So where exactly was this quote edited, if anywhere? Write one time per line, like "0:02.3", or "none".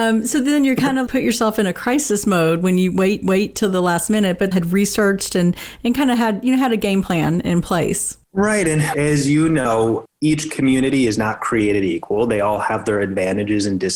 0:01.1
0:03.2
0:04.5
0:08.2